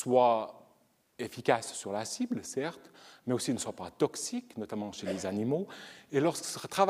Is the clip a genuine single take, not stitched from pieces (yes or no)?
yes